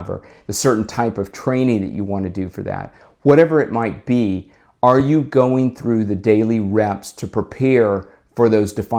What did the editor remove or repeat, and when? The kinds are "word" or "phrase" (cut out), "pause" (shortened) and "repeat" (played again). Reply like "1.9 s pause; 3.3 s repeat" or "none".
none